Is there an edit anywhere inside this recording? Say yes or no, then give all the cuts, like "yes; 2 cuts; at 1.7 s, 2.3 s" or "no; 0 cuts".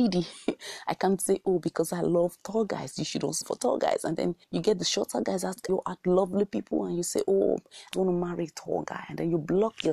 yes; 4 cuts; at 3.4 s, 4.4 s, 5.7 s, 7.9 s